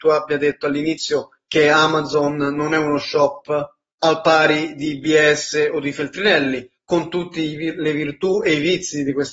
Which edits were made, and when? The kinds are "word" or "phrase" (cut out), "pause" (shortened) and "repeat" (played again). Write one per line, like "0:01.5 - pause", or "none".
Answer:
0:03.9 - pause